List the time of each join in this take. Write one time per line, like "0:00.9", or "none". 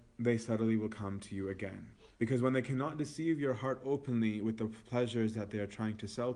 0:02.1